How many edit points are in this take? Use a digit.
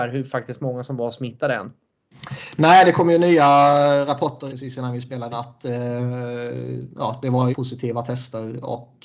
3